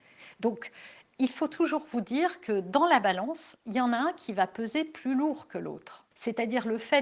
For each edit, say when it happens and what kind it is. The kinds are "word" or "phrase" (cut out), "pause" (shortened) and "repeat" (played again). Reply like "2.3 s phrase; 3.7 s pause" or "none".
6.1 s pause